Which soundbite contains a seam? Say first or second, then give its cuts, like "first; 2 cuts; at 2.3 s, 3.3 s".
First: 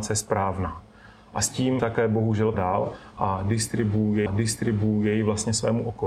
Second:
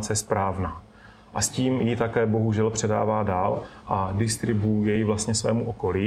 first; 3 cuts; at 1.8 s, 2.5 s, 4.3 s